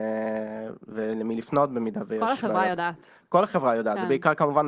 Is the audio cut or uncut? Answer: uncut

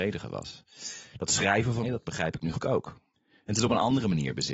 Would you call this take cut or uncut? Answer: cut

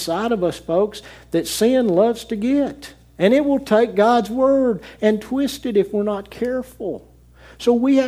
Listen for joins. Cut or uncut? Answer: uncut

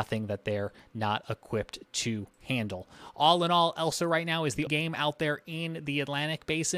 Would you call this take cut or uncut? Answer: cut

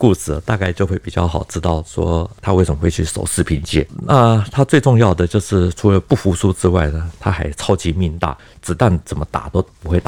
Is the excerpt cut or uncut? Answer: uncut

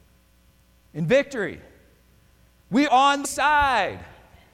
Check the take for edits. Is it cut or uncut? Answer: cut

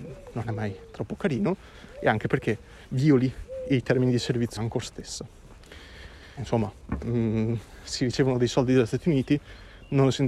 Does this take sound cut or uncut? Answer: cut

